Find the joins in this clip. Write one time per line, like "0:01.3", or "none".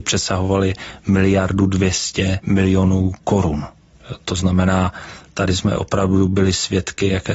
none